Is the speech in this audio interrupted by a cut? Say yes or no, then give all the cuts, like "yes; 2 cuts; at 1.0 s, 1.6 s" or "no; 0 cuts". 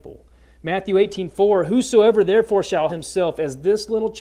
yes; 1 cut; at 2.9 s